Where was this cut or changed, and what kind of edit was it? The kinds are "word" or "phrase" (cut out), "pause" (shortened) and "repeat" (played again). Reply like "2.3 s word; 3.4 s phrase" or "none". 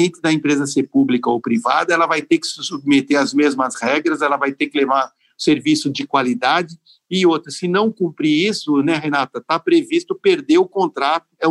none